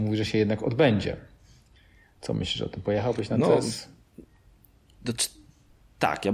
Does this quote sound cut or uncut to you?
uncut